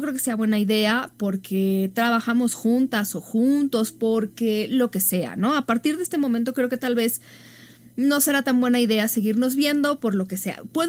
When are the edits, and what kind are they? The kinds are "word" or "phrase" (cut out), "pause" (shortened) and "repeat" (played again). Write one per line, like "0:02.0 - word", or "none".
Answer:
none